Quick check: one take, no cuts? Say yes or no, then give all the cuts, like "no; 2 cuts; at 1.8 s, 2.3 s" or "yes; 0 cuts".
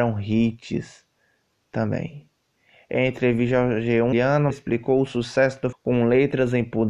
no; 3 cuts; at 4.1 s, 4.5 s, 5.7 s